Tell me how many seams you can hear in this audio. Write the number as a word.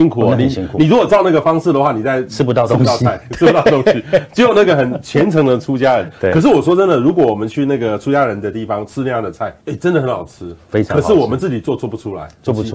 one